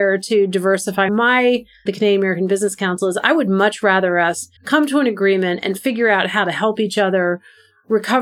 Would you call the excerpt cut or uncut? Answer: cut